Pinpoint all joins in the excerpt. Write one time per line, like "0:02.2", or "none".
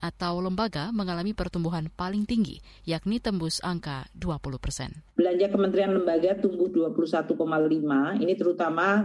0:05.1